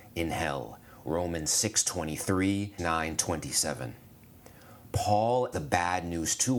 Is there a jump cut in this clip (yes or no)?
yes